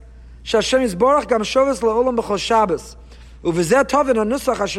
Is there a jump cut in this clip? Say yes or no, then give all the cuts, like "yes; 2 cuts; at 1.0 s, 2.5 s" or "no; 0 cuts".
no; 0 cuts